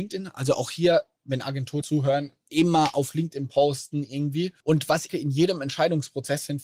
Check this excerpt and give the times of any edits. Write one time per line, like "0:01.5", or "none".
0:01.8
0:04.6
0:05.1